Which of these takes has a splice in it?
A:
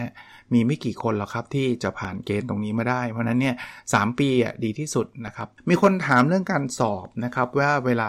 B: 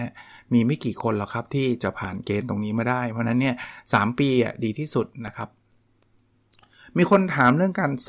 A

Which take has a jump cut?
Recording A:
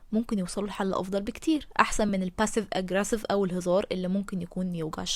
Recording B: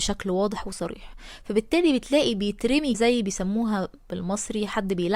B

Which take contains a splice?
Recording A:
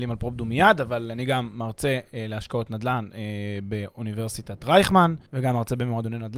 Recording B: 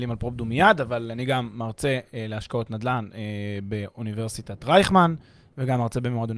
A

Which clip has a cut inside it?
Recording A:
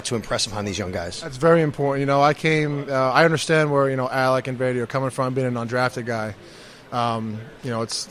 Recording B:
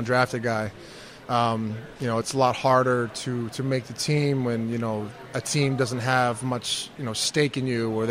B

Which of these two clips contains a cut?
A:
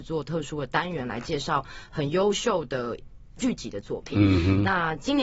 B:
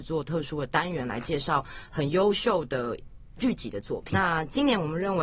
B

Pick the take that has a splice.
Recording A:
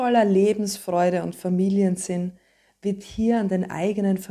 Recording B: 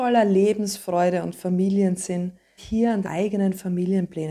B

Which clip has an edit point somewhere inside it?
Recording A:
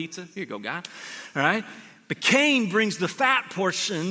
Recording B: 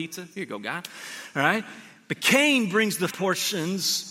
B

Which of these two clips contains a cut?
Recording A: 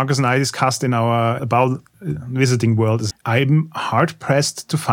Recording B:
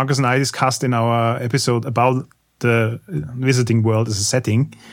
A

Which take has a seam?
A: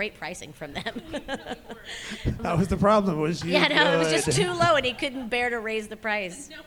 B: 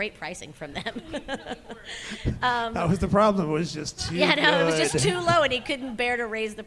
A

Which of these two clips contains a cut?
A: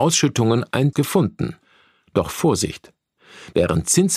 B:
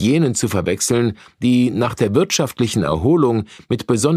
A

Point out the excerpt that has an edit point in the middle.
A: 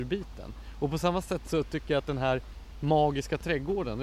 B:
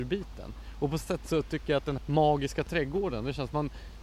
B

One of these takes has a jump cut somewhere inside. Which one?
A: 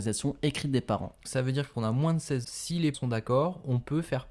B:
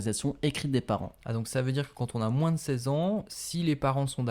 A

